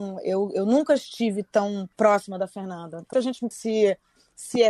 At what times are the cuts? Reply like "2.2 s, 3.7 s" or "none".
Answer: 1.9 s, 3.1 s, 3.5 s